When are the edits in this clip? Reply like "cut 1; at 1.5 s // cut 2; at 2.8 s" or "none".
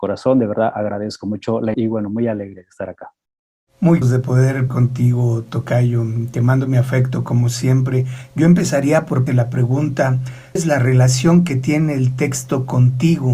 cut 1; at 1.7 s // cut 2; at 4.0 s // cut 3; at 4.7 s // cut 4; at 9.3 s // cut 5; at 10.6 s